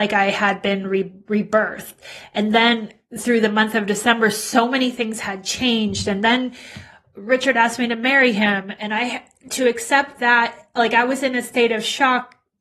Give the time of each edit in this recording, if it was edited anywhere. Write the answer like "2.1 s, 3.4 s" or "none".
none

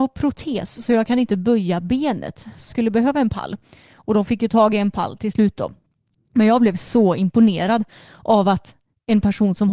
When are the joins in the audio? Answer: 2.7 s

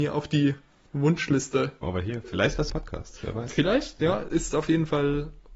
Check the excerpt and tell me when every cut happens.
1.8 s, 2.7 s, 4.5 s

